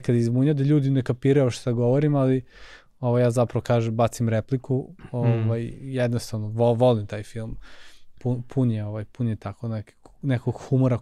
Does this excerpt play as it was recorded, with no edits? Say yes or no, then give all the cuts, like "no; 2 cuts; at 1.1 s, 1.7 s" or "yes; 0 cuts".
yes; 0 cuts